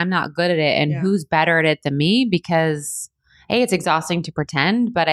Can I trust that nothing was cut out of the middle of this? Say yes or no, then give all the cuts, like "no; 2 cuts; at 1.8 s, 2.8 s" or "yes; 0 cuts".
yes; 0 cuts